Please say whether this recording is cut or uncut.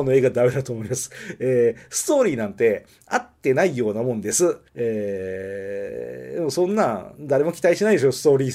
cut